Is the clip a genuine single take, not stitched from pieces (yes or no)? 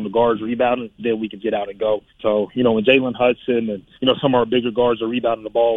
no